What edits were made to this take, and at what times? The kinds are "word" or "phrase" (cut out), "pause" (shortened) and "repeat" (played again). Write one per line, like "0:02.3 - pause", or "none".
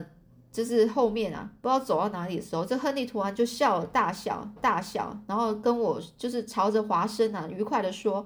0:04.6 - repeat